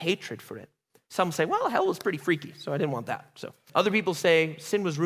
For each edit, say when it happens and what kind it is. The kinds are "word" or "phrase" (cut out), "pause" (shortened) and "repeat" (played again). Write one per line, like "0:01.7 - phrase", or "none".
0:03.7 - word